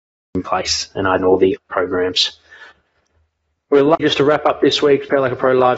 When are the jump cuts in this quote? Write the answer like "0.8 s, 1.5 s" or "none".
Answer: 1.2 s, 1.6 s, 4.0 s